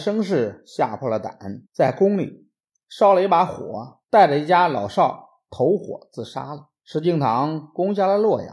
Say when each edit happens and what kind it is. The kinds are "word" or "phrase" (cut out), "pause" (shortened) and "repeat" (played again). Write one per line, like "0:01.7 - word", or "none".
0:01.7 - pause
0:04.0 - pause
0:06.8 - pause